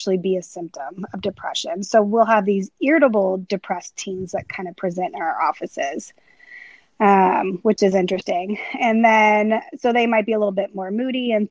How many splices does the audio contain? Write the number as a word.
zero